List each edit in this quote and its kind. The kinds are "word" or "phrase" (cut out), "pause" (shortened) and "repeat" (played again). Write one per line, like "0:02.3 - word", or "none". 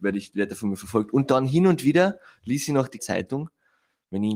0:03.0 - word